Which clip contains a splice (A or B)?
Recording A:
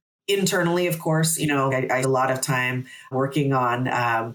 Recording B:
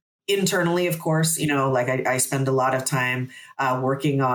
A